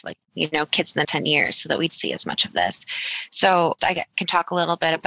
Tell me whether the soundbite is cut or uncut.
cut